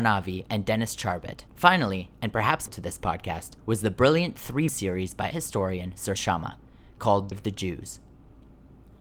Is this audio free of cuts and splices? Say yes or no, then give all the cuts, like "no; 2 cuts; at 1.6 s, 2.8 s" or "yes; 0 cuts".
no; 7 cuts; at 1.5 s, 2.7 s, 3.6 s, 4.7 s, 5.3 s, 6.2 s, 7.3 s